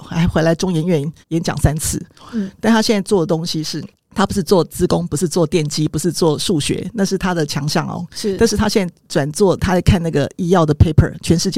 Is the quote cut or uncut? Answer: cut